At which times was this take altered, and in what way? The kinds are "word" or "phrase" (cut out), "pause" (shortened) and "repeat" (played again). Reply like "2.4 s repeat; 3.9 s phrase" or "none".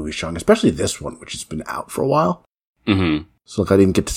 none